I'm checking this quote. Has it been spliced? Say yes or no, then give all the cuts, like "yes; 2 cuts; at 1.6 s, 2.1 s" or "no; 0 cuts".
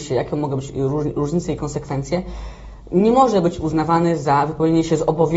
no; 0 cuts